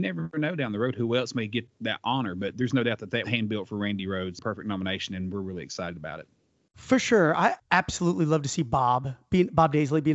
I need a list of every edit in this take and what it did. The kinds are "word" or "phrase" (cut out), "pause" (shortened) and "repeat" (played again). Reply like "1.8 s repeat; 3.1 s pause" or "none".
1.7 s word; 3.2 s word